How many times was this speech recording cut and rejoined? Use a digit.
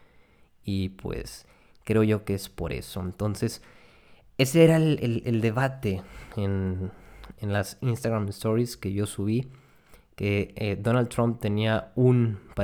0